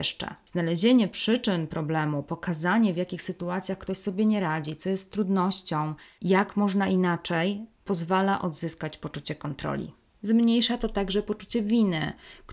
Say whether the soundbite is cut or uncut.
uncut